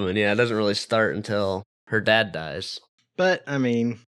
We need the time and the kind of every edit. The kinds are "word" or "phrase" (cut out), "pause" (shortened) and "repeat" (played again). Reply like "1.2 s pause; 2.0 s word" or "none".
none